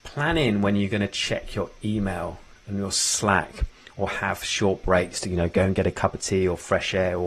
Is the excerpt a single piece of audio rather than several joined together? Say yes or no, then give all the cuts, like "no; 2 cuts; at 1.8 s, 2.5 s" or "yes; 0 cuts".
yes; 0 cuts